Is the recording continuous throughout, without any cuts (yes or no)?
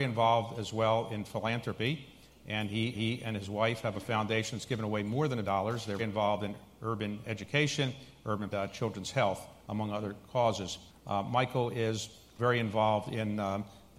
no